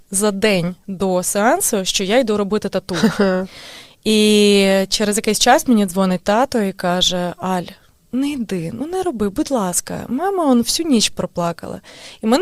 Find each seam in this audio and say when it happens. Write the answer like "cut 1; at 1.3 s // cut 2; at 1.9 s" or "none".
none